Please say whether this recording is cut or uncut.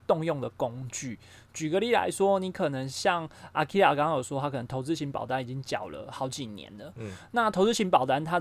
uncut